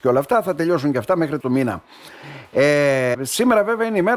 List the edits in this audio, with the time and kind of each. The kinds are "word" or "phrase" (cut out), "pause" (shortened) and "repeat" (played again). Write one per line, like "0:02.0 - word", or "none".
0:01.4 - word
0:03.1 - word

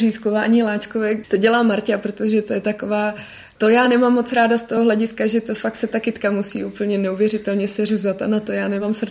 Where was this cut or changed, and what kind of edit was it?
none

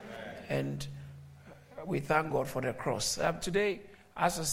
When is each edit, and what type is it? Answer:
none

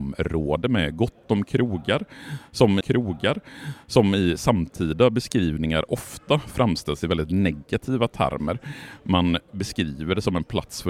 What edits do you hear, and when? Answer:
0:02.8 - repeat

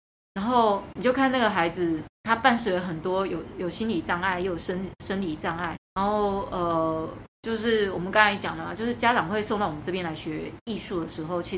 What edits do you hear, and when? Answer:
0:02.1 - pause
0:05.7 - word

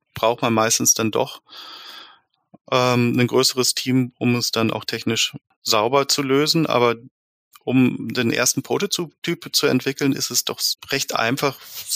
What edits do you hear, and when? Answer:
none

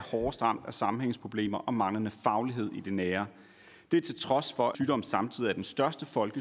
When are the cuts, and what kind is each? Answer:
0:04.7 - word

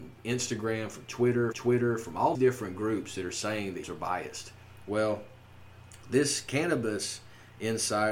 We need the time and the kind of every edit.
0:01.5 - repeat
0:02.3 - word
0:03.8 - phrase

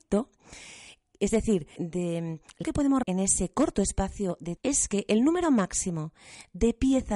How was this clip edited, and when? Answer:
0:01.8 - word
0:02.6 - word
0:03.0 - word
0:04.6 - word

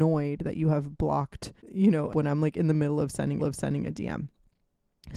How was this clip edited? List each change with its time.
0:01.6 - pause
0:02.1 - phrase
0:03.4 - repeat

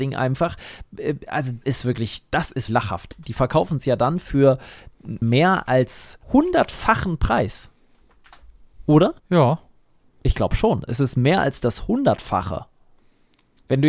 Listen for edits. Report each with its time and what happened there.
0:01.6 - word
0:02.7 - word
0:05.2 - word
0:06.2 - pause
0:09.2 - pause

